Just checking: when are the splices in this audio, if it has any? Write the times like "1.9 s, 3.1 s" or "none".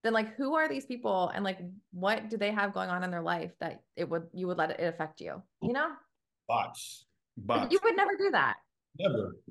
none